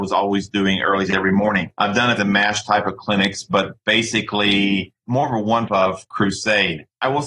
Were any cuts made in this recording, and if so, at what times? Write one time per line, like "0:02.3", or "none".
0:01.1
0:02.2
0:05.7